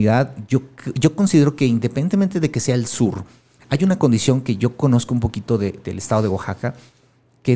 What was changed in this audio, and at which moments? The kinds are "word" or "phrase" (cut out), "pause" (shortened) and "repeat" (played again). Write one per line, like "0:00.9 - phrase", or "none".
none